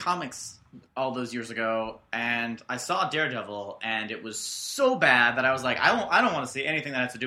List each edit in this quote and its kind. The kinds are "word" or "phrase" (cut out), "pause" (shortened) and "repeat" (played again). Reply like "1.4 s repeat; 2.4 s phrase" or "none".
none